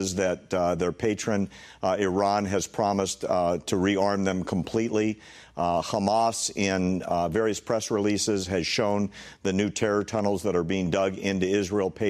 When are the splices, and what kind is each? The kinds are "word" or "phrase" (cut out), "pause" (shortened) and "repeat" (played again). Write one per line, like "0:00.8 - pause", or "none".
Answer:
none

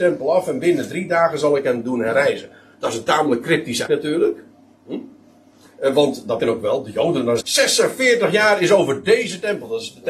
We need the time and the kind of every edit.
0:03.9 - word
0:06.4 - word
0:07.4 - word

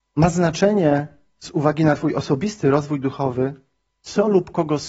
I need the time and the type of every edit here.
none

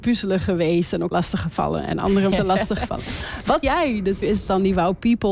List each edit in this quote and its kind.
0:01.1 - word
0:02.3 - word
0:03.6 - word
0:04.2 - word

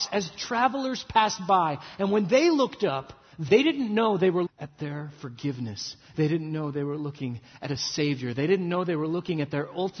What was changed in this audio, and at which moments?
0:03.5 - phrase
0:04.5 - word

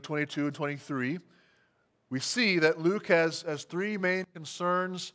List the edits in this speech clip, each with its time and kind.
none

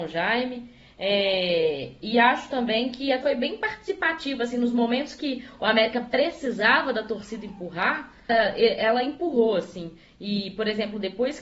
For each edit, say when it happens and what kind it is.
0:03.2 - word
0:08.3 - word

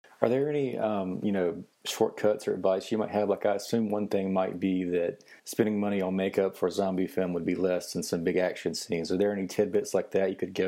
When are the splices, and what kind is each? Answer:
0:01.7 - pause
0:05.4 - pause

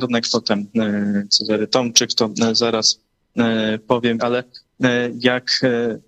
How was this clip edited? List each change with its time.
0:04.2 - word

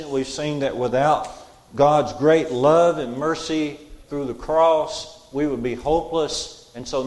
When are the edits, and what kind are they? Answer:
none

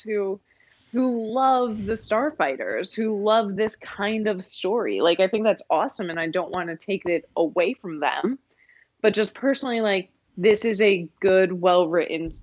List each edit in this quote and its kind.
none

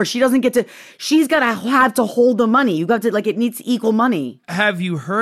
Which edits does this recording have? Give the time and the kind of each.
none

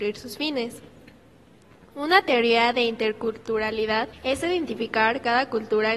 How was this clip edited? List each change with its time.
0:04.1 - pause

